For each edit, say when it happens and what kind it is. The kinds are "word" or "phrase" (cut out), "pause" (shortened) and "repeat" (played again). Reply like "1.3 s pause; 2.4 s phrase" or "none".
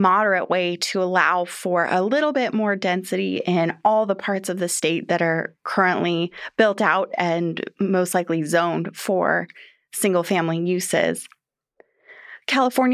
none